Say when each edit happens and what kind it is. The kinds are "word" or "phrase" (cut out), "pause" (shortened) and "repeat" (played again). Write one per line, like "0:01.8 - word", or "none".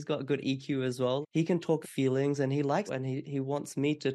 0:01.2 - word
0:01.8 - word
0:02.9 - word